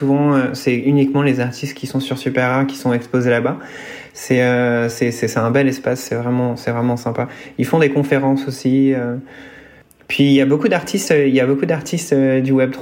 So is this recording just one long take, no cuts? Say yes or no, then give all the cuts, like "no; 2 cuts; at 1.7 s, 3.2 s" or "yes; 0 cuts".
yes; 0 cuts